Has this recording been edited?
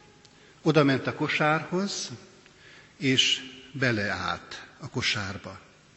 no; 0 cuts

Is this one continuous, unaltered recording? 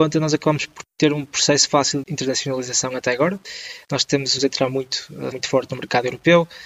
no; 3 cuts; at 2.0 s, 4.4 s, 5.3 s

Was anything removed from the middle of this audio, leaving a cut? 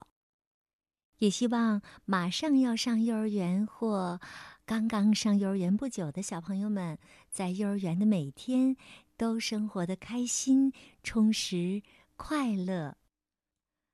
no; 0 cuts

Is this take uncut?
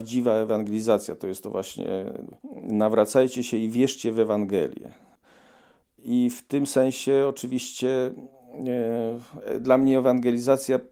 yes; 0 cuts

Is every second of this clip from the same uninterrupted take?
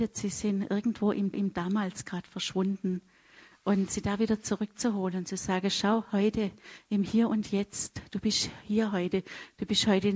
no; 1 cut; at 1.3 s

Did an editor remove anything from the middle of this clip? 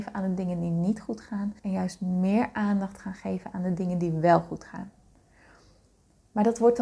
yes; 1 cut; at 1.6 s

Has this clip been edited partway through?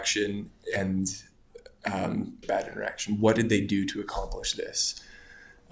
yes; 1 cut; at 2.4 s

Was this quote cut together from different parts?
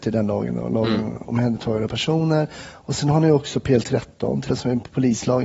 yes; 2 cuts; at 1.9 s, 4.5 s

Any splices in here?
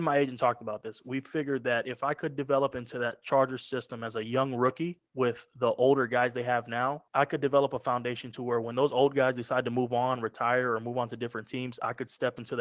yes; 2 cuts; at 5.1 s, 7.1 s

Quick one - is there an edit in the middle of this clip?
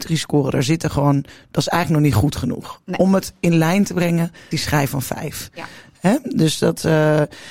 yes; 1 cut; at 4.5 s

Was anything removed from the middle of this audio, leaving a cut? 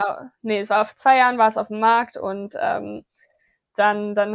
no; 0 cuts

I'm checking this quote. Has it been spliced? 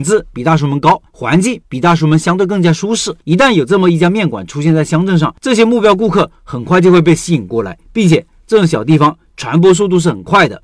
yes; 4 cuts; at 1.1 s, 3.2 s, 5.4 s, 7.8 s

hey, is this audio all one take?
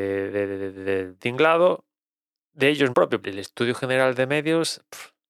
no; 3 cuts; at 1.2 s, 2.9 s, 3.2 s

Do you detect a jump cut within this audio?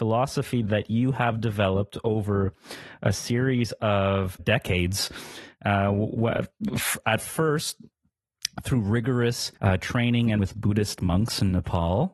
yes; 3 cuts; at 4.4 s, 9.6 s, 10.4 s

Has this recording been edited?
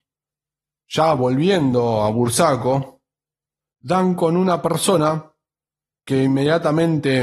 no; 0 cuts

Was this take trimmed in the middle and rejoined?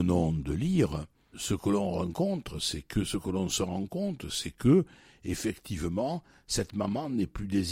yes; 1 cut; at 1.3 s

